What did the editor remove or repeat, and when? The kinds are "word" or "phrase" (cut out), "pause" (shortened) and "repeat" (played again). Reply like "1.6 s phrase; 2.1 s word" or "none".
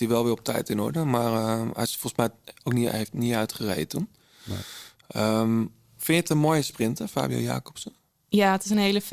none